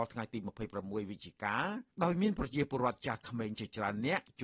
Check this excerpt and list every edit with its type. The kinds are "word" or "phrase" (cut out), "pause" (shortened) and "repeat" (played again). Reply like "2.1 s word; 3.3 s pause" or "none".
1.9 s pause